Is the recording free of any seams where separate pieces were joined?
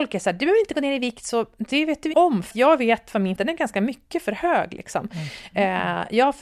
no; 3 cuts; at 2.1 s, 2.5 s, 3.4 s

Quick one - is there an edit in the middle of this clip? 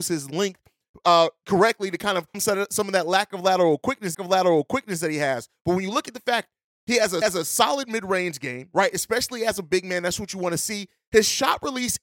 yes; 3 cuts; at 2.3 s, 4.1 s, 7.2 s

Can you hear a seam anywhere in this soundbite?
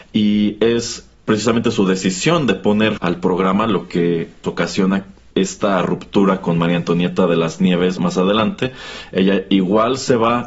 yes; 5 cuts; at 1.1 s, 3.0 s, 4.4 s, 5.3 s, 8.0 s

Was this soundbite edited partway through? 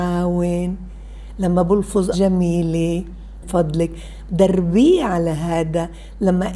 yes; 2 cuts; at 2.1 s, 3.4 s

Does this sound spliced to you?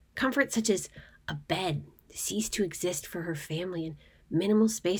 no; 0 cuts

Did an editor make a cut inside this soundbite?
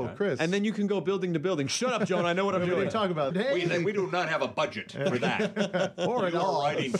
yes; 1 cut; at 3.3 s

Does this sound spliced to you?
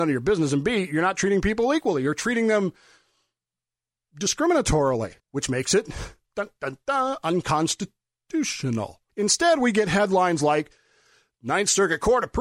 yes; 2 cuts; at 5.2 s, 9.1 s

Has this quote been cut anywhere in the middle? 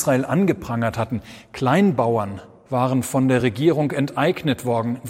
no; 0 cuts

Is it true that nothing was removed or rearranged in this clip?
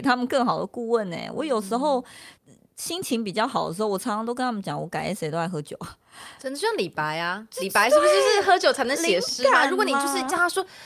no; 1 cut; at 2.4 s

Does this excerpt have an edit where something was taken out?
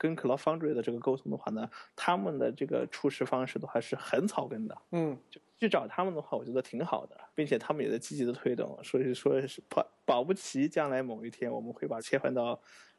yes; 3 cuts; at 4.8 s, 7.3 s, 12.0 s

